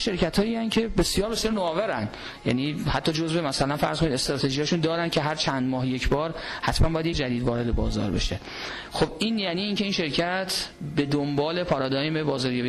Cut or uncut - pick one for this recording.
cut